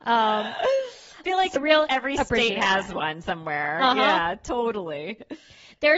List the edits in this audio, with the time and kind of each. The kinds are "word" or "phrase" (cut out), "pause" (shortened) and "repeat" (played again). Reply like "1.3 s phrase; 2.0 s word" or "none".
1.2 s word; 1.6 s word